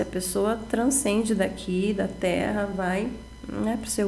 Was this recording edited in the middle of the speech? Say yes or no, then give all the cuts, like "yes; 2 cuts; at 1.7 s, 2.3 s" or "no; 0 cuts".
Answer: no; 0 cuts